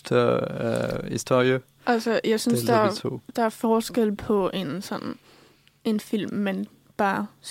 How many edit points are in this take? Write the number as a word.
zero